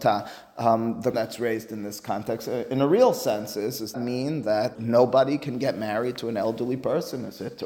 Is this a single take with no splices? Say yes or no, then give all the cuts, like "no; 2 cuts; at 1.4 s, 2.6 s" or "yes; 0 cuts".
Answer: no; 3 cuts; at 1.1 s, 3.9 s, 4.8 s